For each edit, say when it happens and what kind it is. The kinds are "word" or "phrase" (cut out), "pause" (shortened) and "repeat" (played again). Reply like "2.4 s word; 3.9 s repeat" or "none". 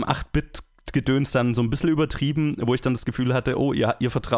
none